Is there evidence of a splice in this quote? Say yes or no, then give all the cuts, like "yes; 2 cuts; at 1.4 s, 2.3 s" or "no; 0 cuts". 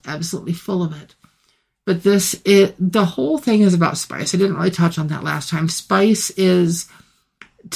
no; 0 cuts